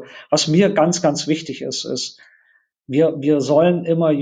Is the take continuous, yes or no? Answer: yes